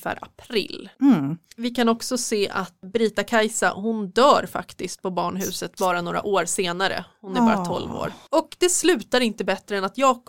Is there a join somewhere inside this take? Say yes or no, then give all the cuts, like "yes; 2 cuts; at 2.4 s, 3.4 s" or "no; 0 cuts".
no; 0 cuts